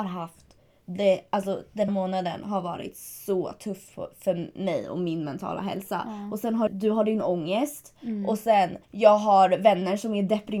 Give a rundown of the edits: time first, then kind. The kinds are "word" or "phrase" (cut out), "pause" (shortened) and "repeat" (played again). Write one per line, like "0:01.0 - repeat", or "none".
0:01.9 - word
0:06.7 - word
0:08.8 - pause